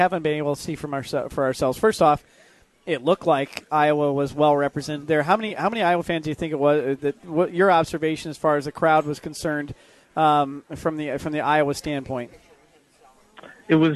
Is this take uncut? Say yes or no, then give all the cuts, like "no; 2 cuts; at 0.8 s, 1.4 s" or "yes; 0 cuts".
yes; 0 cuts